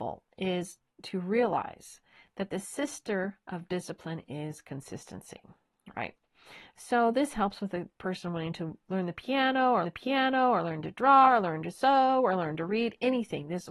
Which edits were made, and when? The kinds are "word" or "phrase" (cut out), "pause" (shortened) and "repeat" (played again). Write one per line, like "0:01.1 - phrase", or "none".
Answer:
0:09.8 - repeat